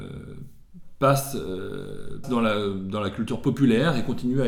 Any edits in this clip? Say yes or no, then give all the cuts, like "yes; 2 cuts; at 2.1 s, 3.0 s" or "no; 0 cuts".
yes; 1 cut; at 2.2 s